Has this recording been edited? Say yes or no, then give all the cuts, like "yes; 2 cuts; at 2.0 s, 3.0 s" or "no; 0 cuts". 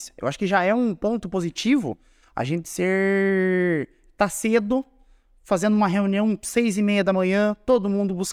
no; 0 cuts